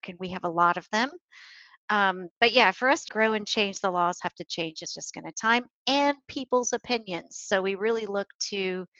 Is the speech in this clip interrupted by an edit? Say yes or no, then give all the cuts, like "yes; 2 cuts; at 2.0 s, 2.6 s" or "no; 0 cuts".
yes; 3 cuts; at 3.1 s, 4.9 s, 5.3 s